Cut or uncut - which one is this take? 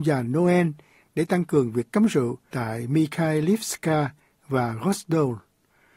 uncut